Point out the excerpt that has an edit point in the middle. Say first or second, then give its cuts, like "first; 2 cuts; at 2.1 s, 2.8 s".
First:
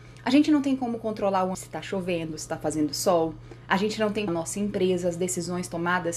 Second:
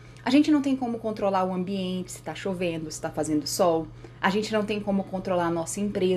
first; 2 cuts; at 1.5 s, 4.3 s